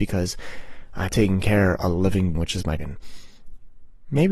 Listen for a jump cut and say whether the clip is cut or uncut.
cut